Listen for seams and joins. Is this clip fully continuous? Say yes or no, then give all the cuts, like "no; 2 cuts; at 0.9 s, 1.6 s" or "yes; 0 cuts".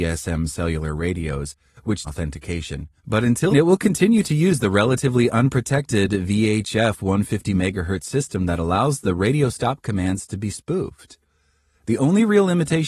no; 3 cuts; at 2.1 s, 3.0 s, 3.5 s